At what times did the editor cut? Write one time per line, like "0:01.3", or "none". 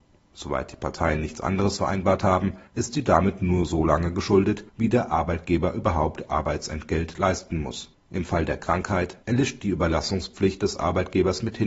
0:02.7
0:04.7
0:07.9
0:09.2